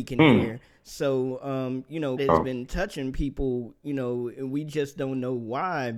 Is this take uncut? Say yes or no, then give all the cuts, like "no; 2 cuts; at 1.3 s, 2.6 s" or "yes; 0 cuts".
no; 1 cut; at 2.2 s